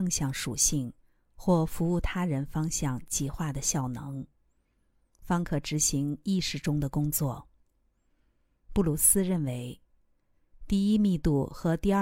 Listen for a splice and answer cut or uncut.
uncut